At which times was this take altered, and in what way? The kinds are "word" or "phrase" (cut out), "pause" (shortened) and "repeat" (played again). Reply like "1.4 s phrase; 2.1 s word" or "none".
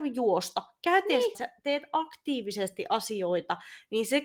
1.3 s word